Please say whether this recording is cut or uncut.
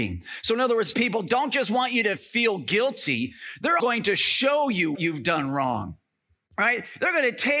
cut